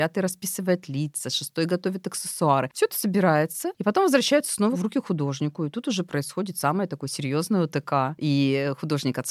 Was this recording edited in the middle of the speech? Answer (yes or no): no